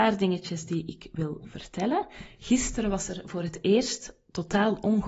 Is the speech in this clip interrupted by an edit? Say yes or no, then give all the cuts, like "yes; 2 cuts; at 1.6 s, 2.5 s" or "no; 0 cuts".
no; 0 cuts